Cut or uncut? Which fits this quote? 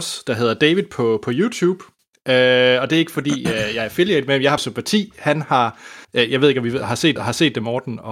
cut